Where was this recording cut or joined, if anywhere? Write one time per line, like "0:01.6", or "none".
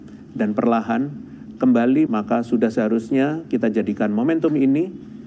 0:02.1